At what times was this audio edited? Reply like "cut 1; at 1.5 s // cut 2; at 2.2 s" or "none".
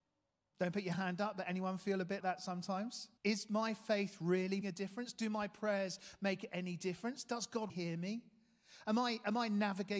cut 1; at 2.2 s // cut 2; at 3.2 s // cut 3; at 4.6 s // cut 4; at 7.7 s

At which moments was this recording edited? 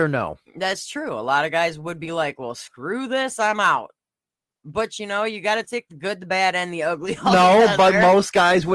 none

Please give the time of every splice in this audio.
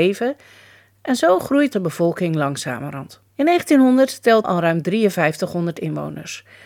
cut 1; at 1.7 s // cut 2; at 3.3 s // cut 3; at 4.4 s

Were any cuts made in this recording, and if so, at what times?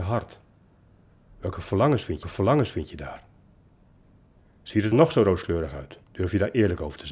cut 1; at 2.2 s // cut 2; at 4.9 s // cut 3; at 6.0 s

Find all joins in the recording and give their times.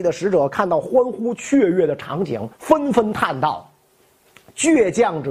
cut 1; at 2.5 s

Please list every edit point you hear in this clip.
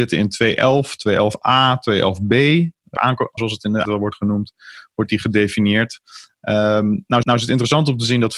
cut 1; at 3.0 s // cut 2; at 3.4 s // cut 3; at 3.8 s // cut 4; at 7.2 s

